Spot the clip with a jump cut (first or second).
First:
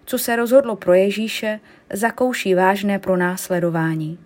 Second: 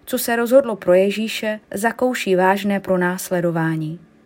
second